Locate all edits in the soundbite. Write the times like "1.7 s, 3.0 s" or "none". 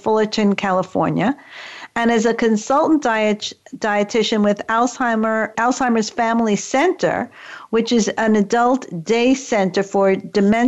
5.5 s